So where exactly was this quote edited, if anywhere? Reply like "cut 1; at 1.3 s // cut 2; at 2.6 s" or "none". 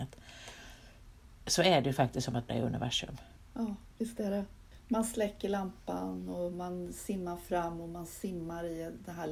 cut 1; at 2.5 s